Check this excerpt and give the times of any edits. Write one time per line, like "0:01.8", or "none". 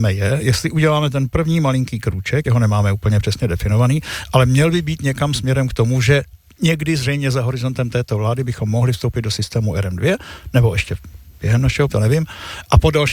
0:02.4
0:11.9